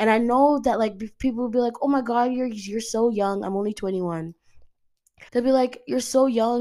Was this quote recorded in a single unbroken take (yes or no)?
no